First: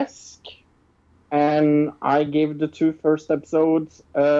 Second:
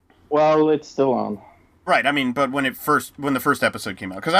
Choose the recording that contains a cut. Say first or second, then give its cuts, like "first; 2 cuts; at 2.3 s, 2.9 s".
second; 1 cut; at 1.9 s